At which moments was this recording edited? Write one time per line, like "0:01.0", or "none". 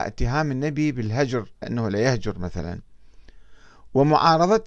0:01.6